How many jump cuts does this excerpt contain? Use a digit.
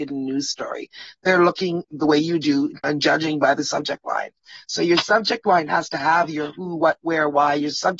1